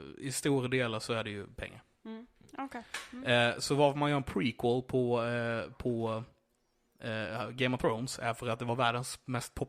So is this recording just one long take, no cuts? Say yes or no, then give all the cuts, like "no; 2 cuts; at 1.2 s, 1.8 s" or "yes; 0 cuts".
yes; 0 cuts